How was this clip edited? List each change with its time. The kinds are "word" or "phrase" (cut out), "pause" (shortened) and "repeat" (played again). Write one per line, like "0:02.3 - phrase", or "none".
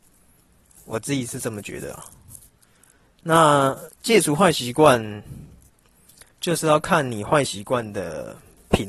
0:03.9 - pause
0:06.3 - pause